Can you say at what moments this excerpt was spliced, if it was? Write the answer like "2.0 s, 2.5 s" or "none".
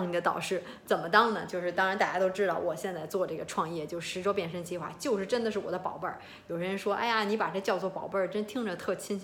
none